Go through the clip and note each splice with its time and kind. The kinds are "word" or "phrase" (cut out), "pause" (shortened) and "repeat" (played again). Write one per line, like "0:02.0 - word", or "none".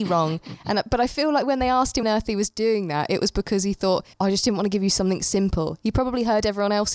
0:02.0 - phrase
0:04.1 - pause